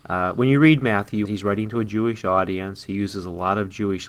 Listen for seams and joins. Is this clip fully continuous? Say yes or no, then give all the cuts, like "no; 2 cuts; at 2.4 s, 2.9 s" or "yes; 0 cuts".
no; 1 cut; at 1.2 s